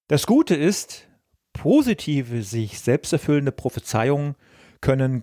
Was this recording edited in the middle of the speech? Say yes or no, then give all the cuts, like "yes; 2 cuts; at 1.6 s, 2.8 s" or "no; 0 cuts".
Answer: no; 0 cuts